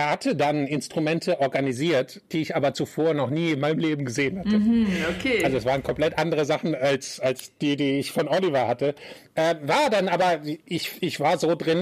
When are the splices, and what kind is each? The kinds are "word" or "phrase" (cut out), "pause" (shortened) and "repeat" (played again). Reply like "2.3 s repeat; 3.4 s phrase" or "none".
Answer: none